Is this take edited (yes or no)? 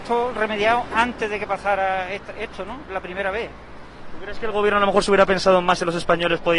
no